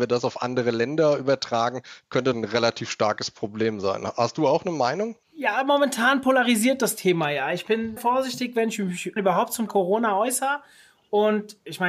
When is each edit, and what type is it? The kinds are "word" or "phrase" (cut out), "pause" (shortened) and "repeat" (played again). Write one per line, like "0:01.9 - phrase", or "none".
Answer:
0:02.3 - phrase
0:05.2 - pause
0:08.0 - word
0:09.2 - word
0:09.7 - word